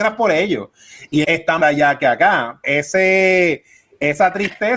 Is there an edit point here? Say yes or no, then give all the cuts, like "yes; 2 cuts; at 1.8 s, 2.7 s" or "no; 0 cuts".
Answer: yes; 3 cuts; at 1.2 s, 1.6 s, 2.6 s